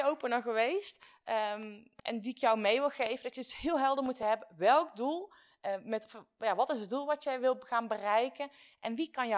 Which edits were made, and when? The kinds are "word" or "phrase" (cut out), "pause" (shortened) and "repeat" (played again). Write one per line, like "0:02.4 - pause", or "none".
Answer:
none